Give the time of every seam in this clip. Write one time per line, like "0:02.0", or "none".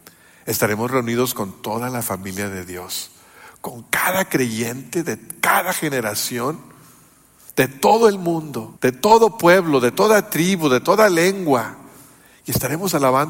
0:08.8